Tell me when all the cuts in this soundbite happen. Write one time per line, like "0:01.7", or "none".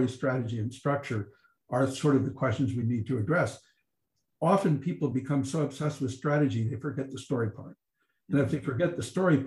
none